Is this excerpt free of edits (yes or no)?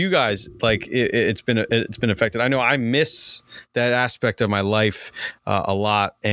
yes